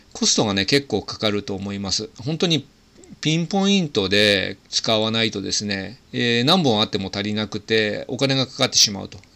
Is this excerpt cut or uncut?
cut